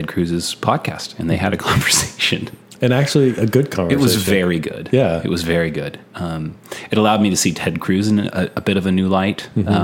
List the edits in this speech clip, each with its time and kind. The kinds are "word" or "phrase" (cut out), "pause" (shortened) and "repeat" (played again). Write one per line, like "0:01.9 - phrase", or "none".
none